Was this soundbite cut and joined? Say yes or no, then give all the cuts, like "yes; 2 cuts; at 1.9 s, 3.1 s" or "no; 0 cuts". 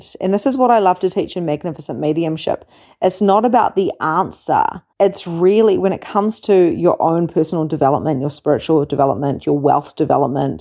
yes; 1 cut; at 4.9 s